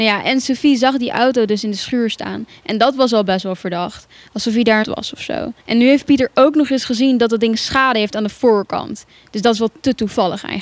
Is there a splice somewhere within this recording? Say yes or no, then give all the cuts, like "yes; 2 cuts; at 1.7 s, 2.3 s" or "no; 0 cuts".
yes; 2 cuts; at 4.8 s, 5.6 s